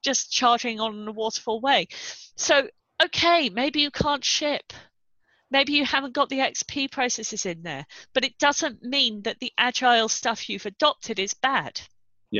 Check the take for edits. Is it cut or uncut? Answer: cut